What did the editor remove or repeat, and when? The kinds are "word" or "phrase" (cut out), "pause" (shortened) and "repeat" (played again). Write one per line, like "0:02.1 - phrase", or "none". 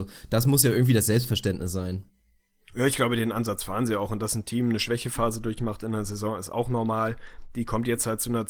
none